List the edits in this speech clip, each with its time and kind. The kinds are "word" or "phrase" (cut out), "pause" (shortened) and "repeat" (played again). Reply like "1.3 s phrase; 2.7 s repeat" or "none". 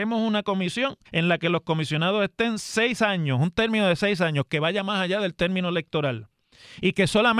1.1 s pause